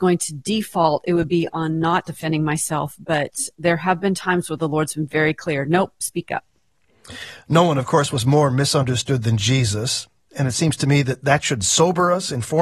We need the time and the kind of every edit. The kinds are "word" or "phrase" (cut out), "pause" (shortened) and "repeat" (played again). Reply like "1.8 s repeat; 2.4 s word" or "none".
none